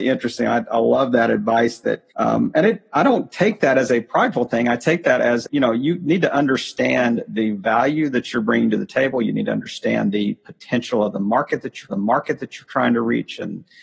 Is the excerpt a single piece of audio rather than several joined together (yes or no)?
no